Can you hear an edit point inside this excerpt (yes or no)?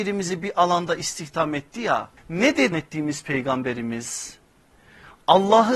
yes